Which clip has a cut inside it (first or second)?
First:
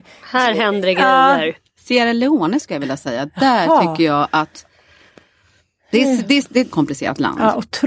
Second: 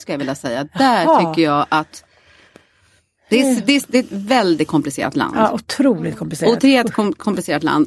first